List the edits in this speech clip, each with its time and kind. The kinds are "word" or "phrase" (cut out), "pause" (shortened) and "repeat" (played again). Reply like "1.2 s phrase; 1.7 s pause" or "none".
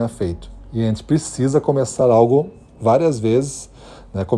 none